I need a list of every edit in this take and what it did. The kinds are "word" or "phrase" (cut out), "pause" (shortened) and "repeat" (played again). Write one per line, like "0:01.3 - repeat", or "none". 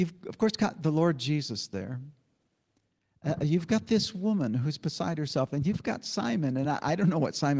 none